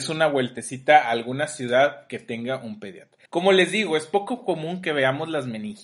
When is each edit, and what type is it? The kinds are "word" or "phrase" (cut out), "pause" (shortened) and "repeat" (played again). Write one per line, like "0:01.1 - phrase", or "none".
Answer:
0:03.3 - pause